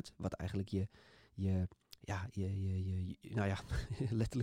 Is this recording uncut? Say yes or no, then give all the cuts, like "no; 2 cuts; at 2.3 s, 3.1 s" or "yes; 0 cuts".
yes; 0 cuts